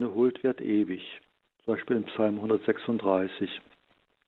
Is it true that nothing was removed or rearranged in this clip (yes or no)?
no